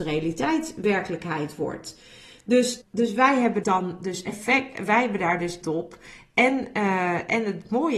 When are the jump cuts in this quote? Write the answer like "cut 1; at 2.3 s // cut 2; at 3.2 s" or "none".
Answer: cut 1; at 2.8 s // cut 2; at 3.6 s // cut 3; at 5.6 s